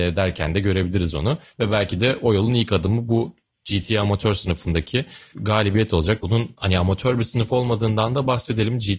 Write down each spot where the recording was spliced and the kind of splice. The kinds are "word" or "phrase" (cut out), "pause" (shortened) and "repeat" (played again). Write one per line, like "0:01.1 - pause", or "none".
none